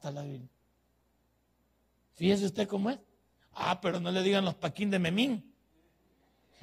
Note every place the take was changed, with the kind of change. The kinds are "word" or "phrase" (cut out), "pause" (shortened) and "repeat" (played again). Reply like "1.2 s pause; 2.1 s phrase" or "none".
none